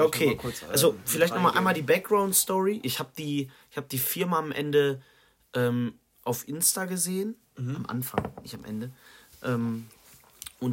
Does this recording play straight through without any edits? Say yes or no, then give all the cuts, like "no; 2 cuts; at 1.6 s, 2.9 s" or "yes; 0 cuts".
yes; 0 cuts